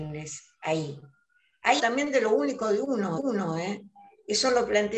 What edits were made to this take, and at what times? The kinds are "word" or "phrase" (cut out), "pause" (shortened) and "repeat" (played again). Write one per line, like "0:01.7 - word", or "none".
0:01.8 - word
0:03.2 - repeat